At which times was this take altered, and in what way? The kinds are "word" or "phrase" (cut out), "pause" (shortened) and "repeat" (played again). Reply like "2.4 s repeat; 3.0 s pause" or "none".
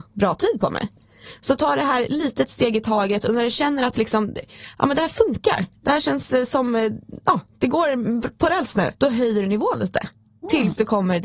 9.0 s pause